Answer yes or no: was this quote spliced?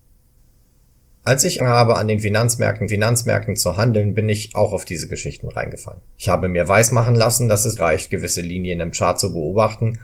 yes